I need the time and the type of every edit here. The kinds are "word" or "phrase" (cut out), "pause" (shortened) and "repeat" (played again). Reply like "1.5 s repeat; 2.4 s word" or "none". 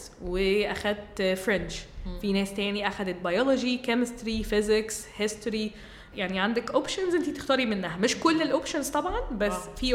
6.1 s word